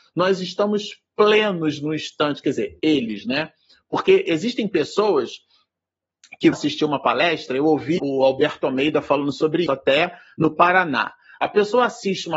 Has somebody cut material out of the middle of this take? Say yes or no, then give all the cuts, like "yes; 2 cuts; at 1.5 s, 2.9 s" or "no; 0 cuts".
yes; 4 cuts; at 2.8 s, 6.5 s, 8.0 s, 9.7 s